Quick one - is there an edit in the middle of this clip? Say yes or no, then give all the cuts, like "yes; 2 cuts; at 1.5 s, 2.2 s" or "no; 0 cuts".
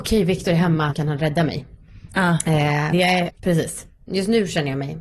yes; 3 cuts; at 0.9 s, 2.9 s, 3.3 s